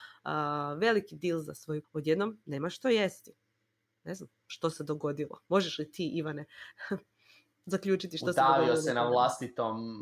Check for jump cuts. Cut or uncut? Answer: cut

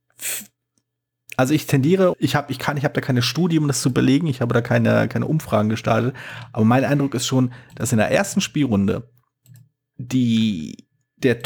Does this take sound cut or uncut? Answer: cut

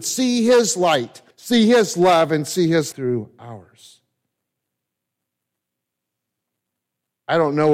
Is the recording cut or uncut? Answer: cut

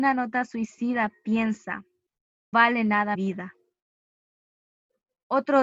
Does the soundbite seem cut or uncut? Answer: cut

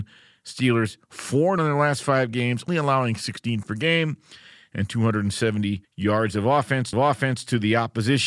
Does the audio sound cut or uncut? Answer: cut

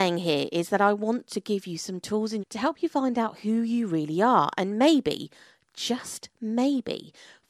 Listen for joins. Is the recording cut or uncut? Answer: cut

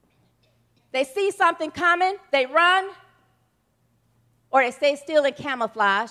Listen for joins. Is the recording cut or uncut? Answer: uncut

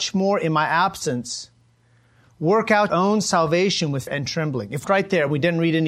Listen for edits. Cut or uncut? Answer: cut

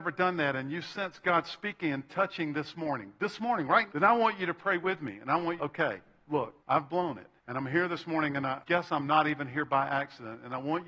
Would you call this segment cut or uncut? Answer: cut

